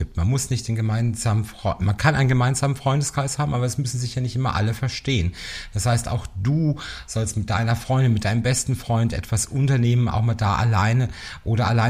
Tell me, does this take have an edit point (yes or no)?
no